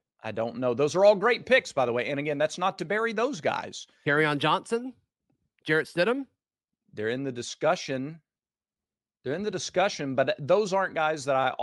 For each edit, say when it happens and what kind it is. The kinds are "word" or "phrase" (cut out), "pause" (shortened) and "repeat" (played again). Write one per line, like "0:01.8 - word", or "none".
none